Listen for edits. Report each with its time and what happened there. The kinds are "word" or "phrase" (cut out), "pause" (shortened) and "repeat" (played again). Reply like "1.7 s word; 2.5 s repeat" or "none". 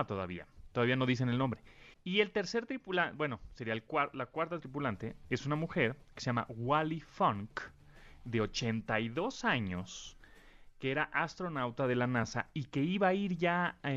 1.9 s pause